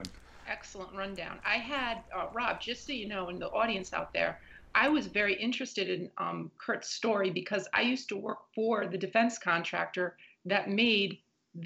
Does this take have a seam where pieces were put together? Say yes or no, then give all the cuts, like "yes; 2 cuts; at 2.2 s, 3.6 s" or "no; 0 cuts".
no; 0 cuts